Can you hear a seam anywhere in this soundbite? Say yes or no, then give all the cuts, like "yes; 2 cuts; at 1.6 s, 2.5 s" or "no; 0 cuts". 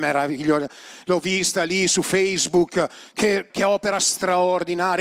yes; 1 cut; at 3.5 s